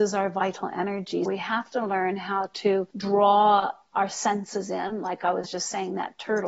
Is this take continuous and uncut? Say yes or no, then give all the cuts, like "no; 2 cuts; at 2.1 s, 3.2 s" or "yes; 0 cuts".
no; 2 cuts; at 1.3 s, 2.9 s